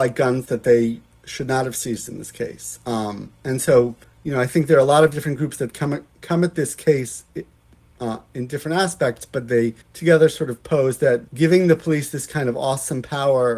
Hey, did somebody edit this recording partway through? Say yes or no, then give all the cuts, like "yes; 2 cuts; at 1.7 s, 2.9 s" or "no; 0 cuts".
yes; 3 cuts; at 4.0 s, 9.8 s, 11.3 s